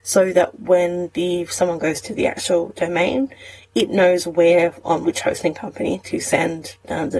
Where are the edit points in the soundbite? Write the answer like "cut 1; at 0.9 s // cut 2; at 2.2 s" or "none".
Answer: cut 1; at 5.0 s